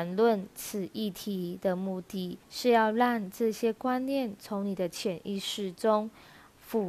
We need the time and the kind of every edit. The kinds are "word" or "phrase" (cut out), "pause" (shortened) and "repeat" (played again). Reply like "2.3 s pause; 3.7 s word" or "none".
2.4 s pause